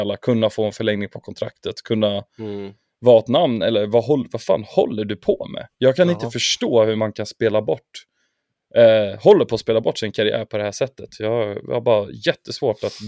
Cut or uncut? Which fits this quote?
uncut